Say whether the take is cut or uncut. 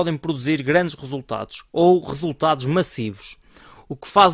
uncut